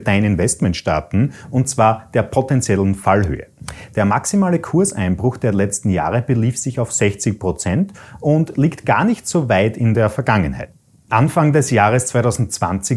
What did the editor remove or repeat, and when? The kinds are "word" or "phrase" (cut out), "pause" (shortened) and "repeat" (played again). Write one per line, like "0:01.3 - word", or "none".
none